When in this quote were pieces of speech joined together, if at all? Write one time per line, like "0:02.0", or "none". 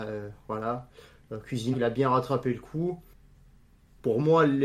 0:01.7